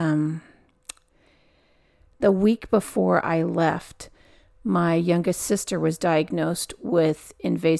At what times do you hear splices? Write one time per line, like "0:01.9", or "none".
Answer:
none